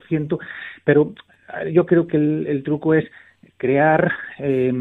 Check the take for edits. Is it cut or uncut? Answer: uncut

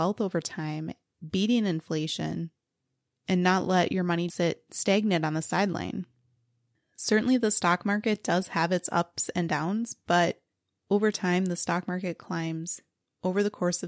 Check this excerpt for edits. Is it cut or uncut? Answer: cut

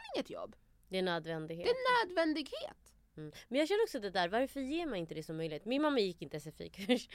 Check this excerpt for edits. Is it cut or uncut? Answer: uncut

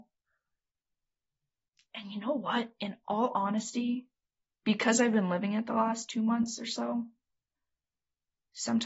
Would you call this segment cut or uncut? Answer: cut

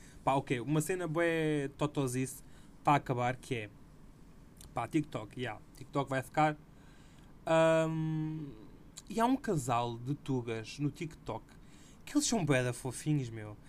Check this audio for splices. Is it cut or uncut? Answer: uncut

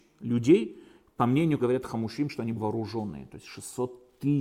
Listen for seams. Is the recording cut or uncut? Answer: cut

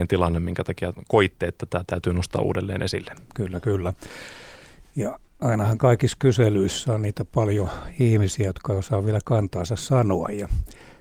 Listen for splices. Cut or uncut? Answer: uncut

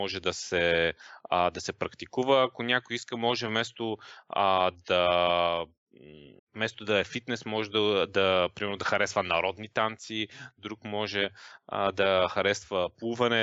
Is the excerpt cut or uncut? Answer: cut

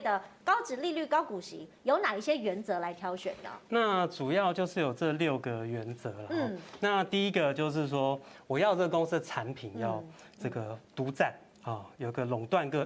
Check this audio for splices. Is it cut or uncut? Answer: cut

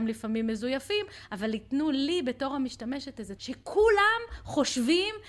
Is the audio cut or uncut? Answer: cut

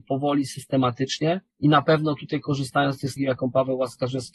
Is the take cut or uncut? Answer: cut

